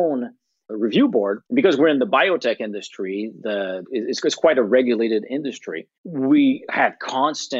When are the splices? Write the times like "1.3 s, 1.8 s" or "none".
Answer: 1.5 s, 6.0 s